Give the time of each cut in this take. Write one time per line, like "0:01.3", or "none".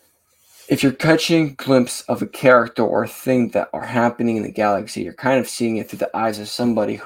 none